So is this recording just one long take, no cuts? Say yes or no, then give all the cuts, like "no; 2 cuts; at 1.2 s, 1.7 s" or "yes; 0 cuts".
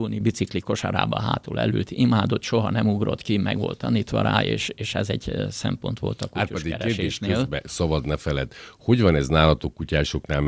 yes; 0 cuts